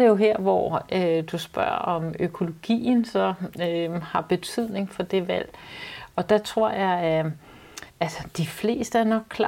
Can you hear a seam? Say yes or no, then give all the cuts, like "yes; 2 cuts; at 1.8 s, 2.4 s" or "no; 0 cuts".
yes; 1 cut; at 7.9 s